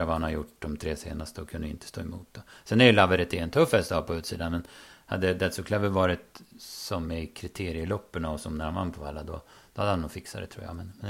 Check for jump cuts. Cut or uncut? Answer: uncut